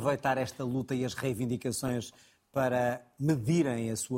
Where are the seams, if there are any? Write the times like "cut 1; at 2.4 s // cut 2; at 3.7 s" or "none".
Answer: none